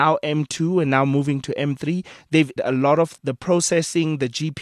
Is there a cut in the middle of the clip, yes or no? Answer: yes